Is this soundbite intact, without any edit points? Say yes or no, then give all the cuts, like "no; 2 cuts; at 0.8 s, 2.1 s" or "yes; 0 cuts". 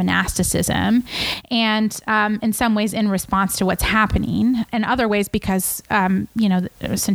no; 1 cut; at 4.7 s